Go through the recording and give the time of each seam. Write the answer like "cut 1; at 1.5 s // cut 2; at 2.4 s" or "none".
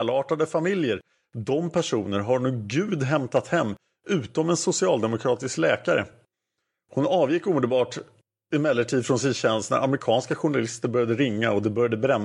none